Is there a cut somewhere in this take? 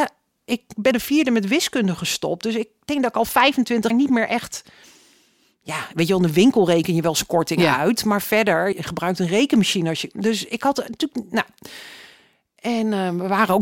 yes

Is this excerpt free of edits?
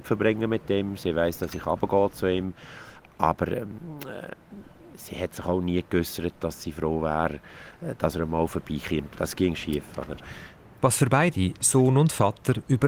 yes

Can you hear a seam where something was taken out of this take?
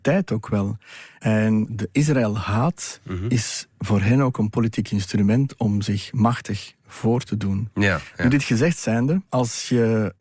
yes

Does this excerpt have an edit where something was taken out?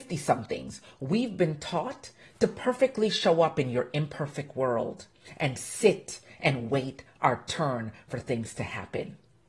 no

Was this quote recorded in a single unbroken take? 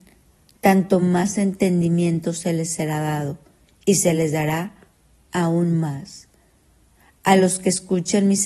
yes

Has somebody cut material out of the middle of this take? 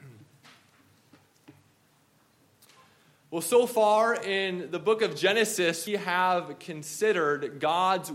yes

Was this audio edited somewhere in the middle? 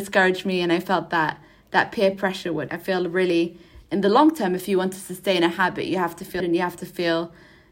yes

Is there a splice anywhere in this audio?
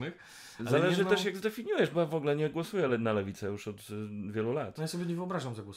no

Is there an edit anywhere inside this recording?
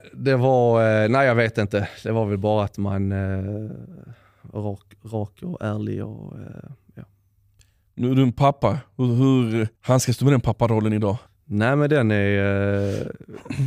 yes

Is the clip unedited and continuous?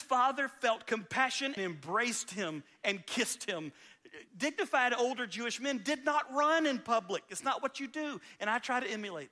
no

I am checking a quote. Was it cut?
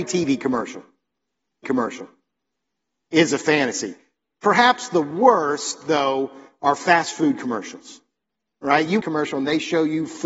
yes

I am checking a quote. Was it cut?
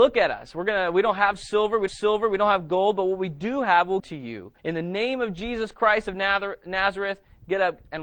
yes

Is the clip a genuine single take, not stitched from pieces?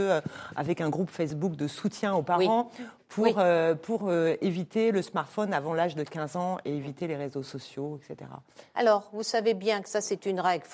yes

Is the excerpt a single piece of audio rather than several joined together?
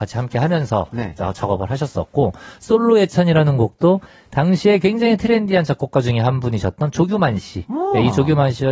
yes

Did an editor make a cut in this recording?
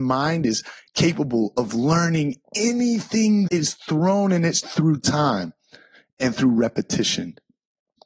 yes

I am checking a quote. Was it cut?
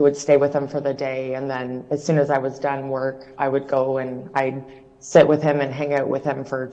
no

